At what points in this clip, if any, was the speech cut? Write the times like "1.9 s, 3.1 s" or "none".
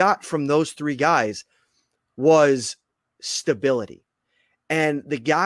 none